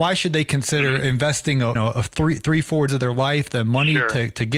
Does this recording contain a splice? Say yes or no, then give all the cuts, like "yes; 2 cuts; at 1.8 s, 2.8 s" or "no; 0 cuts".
yes; 2 cuts; at 1.8 s, 2.9 s